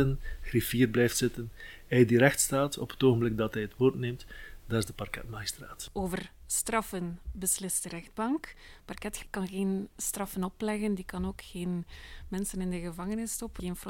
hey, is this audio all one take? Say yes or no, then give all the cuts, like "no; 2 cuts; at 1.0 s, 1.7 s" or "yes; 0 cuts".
yes; 0 cuts